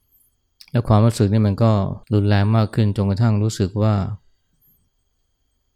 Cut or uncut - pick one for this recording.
cut